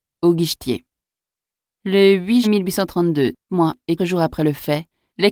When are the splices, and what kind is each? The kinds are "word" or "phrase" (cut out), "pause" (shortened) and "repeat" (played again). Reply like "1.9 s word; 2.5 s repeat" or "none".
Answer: 2.4 s word; 3.5 s word; 4.0 s word